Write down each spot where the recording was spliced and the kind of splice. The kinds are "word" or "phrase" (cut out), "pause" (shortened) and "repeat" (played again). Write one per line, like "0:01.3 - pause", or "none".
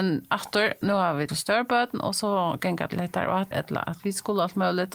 0:01.3 - word
0:02.9 - word
0:03.5 - word